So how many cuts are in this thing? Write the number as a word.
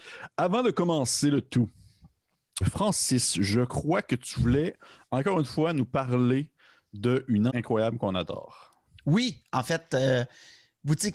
two